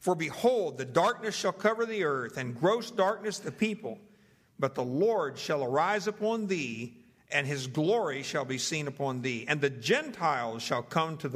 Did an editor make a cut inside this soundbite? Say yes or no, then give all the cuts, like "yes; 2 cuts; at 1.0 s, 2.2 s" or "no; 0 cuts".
no; 0 cuts